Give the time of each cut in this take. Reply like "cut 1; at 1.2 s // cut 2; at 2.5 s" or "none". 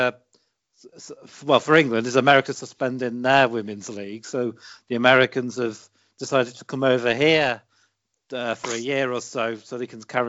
none